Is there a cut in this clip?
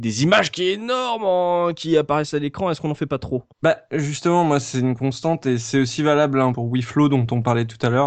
yes; 2 cuts; at 3.5 s, 6.5 s

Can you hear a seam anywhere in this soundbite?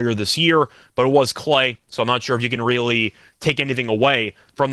no; 0 cuts

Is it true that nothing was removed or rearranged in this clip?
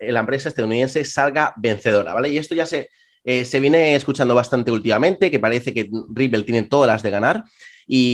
yes; 0 cuts

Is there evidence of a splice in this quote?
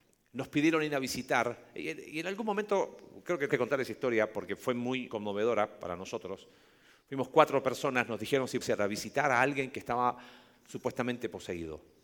yes; 3 cuts; at 3.5 s, 5.1 s, 8.6 s

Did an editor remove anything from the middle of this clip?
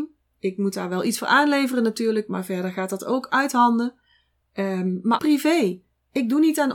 yes; 1 cut; at 5.2 s

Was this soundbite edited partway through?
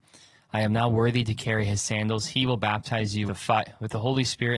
yes; 1 cut; at 3.3 s

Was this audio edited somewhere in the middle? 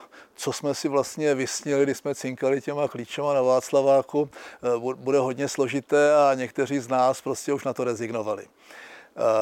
no; 0 cuts

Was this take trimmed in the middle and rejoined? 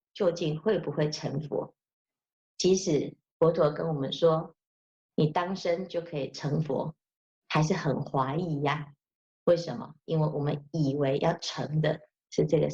no; 0 cuts

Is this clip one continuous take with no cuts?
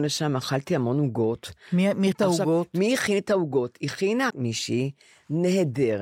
no; 2 cuts; at 2.1 s, 4.3 s

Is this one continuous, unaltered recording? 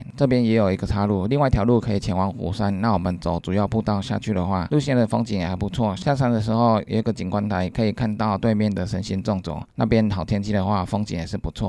no; 1 cut; at 9.7 s

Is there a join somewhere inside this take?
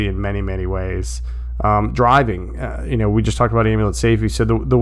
no; 0 cuts

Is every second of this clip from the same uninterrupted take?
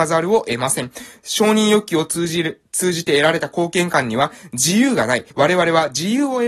no; 1 cut; at 5.3 s

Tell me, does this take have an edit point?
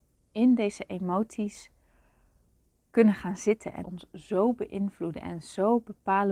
yes; 1 cut; at 3.8 s

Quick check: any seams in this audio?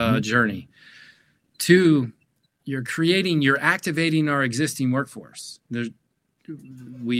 yes; 1 cut; at 2.6 s

